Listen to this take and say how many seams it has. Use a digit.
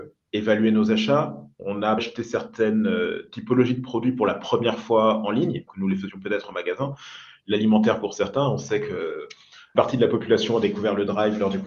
4